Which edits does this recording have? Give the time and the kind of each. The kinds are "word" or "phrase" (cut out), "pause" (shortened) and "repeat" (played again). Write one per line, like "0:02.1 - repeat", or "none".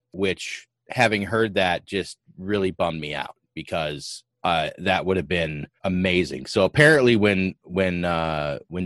0:04.3 - pause
0:05.8 - pause

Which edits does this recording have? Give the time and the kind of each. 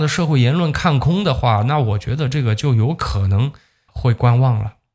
0:03.9 - word

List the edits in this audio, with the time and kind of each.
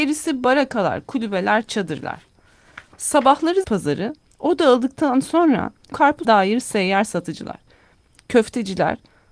0:03.6 - word
0:05.9 - word
0:06.2 - phrase

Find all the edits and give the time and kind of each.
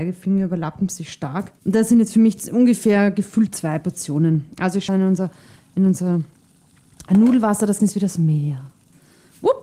0:01.6 - pause
0:04.9 - phrase
0:07.8 - word

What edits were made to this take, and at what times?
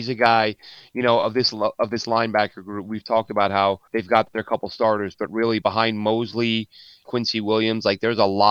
0:03.9 - pause
0:05.6 - word
0:07.0 - word

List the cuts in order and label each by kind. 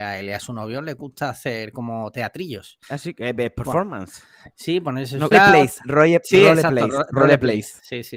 0:02.8 - pause
0:05.3 - word

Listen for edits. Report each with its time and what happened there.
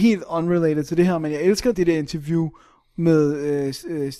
0:01.7 - word

